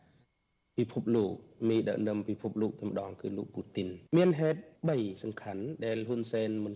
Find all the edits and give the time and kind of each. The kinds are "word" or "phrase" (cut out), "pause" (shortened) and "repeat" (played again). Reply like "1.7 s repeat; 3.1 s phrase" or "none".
4.1 s pause; 4.8 s pause